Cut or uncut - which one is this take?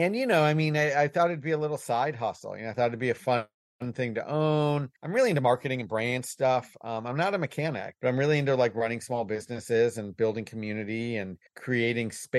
cut